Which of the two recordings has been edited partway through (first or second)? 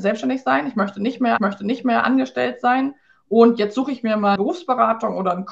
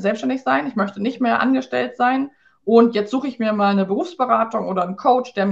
first